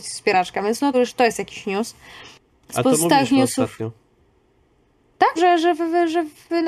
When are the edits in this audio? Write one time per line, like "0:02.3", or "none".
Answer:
0:00.9
0:05.4